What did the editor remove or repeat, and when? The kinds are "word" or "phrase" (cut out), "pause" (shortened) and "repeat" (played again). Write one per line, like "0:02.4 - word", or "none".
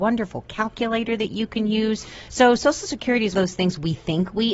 0:03.3 - word